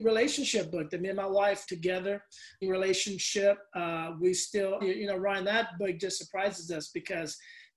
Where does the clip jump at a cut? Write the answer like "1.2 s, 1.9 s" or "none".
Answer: 1.7 s, 2.6 s, 4.8 s